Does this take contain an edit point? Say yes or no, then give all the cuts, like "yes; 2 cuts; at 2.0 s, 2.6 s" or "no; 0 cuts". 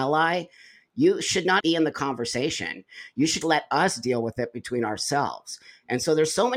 yes; 2 cuts; at 1.6 s, 3.4 s